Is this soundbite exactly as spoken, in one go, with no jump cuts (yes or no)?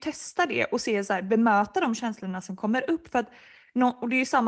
yes